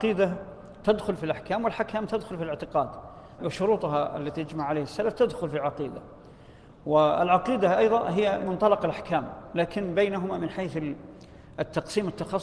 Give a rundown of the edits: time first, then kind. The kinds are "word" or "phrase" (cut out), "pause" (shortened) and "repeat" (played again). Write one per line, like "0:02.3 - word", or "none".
0:03.4 - phrase
0:08.4 - word